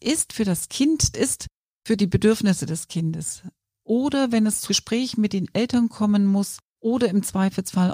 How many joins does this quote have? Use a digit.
2